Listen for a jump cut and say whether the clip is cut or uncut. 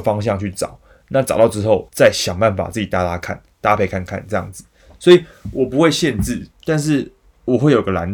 cut